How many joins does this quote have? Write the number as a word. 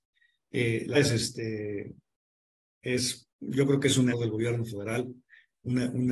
three